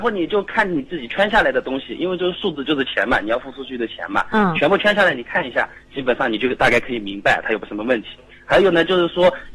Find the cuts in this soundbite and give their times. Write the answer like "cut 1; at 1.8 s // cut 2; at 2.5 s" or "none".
none